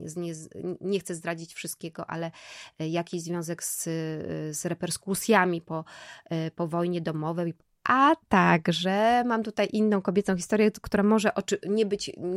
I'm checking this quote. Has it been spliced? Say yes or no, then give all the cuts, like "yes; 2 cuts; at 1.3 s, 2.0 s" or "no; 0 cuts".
no; 0 cuts